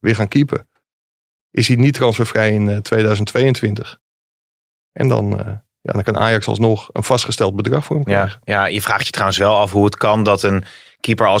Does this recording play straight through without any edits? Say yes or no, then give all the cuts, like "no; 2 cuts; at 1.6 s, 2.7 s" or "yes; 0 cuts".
yes; 0 cuts